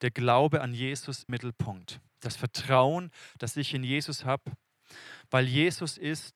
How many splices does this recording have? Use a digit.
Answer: 2